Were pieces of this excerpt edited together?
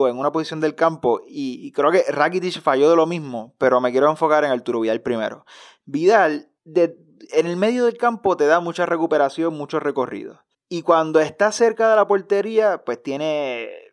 yes; 2 cuts; at 6.6 s, 10.5 s

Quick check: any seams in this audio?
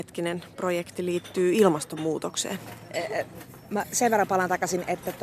no; 0 cuts

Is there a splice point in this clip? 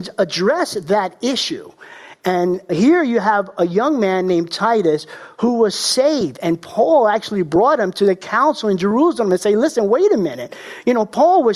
no; 0 cuts

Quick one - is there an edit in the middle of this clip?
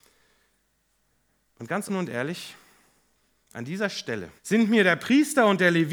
yes; 3 cuts; at 1.9 s, 3.2 s, 4.4 s

